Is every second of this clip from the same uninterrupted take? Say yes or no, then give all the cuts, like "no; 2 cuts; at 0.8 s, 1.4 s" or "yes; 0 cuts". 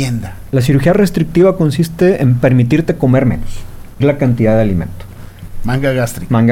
no; 1 cut; at 4.0 s